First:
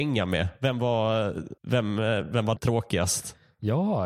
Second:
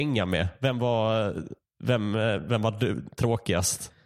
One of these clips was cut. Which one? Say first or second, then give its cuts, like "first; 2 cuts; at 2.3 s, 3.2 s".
first; 2 cuts; at 1.6 s, 2.6 s